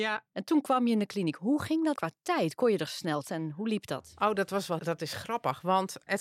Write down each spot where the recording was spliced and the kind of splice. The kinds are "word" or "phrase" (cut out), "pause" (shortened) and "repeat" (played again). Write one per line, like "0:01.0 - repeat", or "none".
0:02.0 - word
0:03.2 - word
0:04.8 - word